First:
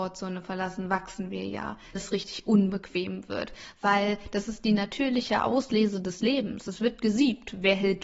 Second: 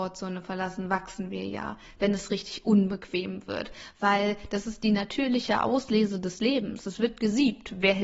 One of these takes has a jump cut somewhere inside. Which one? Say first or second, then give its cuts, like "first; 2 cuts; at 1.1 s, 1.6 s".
first; 1 cut; at 2.0 s